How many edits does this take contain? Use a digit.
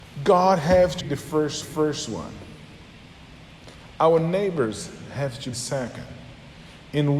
3